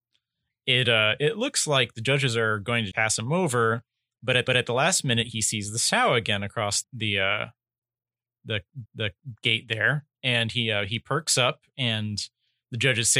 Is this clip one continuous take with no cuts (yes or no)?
no